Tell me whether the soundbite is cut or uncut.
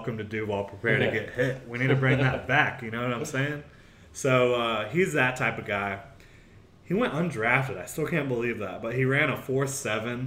uncut